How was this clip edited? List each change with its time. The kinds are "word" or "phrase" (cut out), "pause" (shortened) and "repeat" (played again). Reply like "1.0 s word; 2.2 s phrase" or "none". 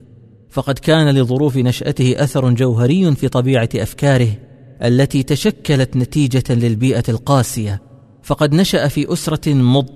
none